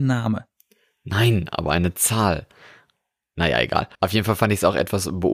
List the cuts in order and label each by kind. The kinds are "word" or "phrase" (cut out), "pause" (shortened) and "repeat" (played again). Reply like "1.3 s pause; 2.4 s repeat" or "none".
3.9 s pause